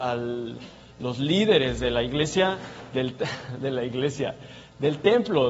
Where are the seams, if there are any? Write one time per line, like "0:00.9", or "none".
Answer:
none